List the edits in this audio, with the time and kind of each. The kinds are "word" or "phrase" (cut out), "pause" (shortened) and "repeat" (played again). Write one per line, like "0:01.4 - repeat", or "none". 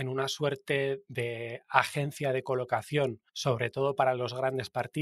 0:03.3 - pause